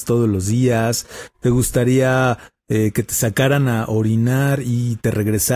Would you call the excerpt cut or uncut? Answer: uncut